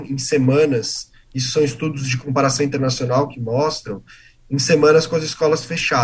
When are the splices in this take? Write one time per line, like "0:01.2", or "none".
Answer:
none